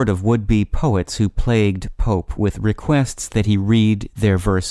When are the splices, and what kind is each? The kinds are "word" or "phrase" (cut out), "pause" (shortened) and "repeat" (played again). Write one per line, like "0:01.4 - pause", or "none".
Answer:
none